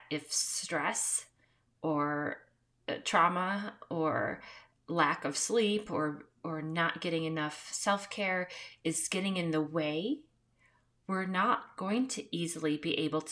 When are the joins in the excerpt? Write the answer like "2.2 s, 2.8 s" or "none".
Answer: none